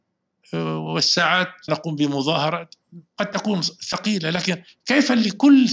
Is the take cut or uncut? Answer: cut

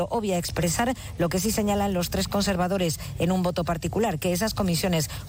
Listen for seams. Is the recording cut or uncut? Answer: uncut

